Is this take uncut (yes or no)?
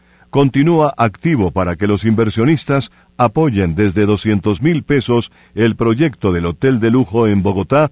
yes